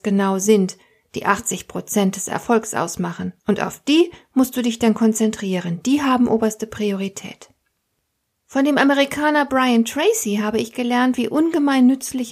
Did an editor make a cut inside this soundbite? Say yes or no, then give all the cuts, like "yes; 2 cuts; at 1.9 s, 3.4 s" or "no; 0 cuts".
yes; 1 cut; at 3.4 s